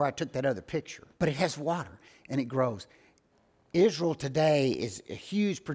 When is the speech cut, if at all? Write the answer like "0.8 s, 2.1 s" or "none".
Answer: 1.1 s